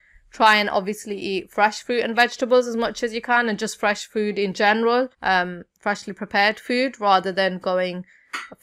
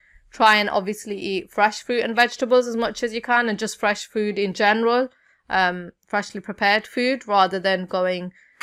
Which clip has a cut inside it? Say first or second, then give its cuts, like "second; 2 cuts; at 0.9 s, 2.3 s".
first; 1 cut; at 5.1 s